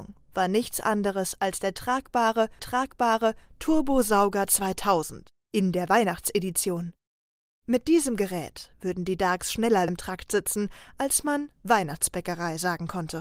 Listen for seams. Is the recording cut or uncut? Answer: cut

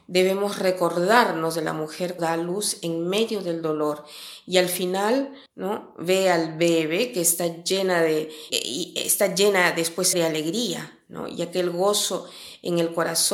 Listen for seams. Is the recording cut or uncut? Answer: cut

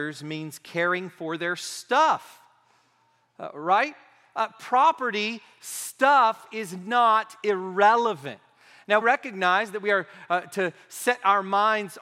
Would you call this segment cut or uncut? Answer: cut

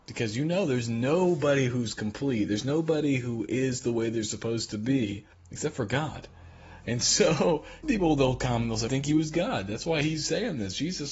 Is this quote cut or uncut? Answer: cut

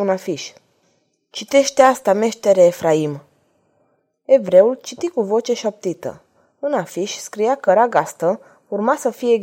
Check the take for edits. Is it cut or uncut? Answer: uncut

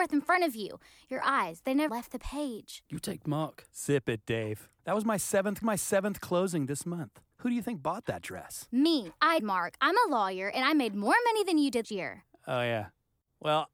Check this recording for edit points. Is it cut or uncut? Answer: cut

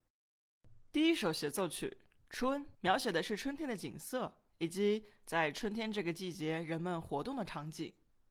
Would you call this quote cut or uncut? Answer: cut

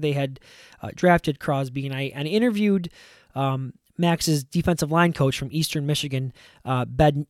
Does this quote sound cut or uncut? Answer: uncut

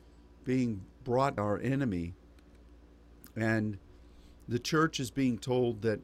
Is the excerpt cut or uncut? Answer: cut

